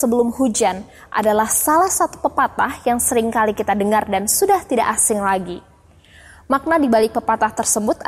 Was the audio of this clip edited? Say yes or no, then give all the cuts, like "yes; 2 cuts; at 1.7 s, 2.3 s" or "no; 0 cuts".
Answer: no; 0 cuts